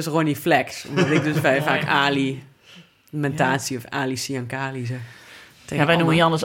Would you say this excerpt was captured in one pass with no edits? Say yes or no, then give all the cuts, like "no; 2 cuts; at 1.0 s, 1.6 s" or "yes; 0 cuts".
yes; 0 cuts